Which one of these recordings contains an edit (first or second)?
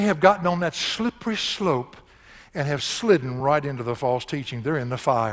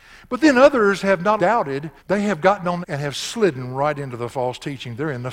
second